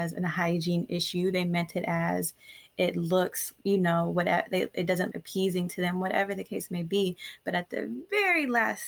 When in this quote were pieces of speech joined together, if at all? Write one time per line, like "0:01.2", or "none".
0:03.6
0:05.1